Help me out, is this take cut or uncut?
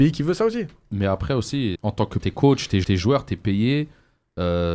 cut